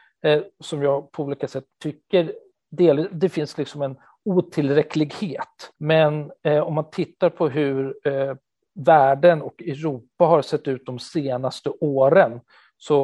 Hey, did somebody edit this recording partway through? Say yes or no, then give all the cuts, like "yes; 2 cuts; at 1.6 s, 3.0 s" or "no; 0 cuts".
yes; 3 cuts; at 1.7 s, 5.7 s, 8.5 s